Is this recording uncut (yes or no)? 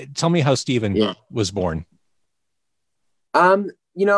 yes